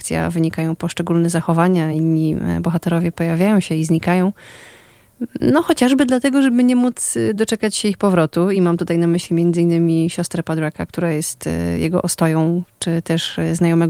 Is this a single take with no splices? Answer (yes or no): yes